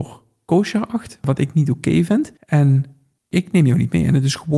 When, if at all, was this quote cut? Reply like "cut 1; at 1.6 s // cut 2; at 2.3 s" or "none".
cut 1; at 2.4 s